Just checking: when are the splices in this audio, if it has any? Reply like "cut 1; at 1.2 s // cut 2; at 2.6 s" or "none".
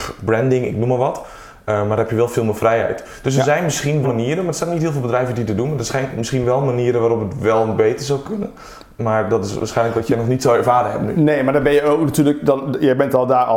cut 1; at 4.0 s